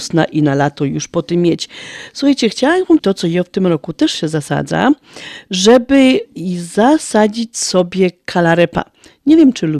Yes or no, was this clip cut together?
yes